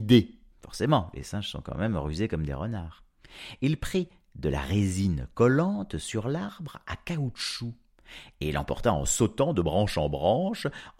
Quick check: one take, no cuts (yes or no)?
yes